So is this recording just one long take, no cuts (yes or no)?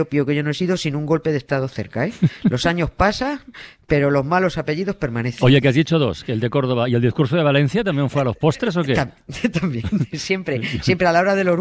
yes